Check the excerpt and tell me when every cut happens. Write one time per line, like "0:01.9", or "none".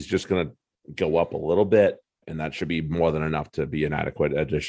0:02.0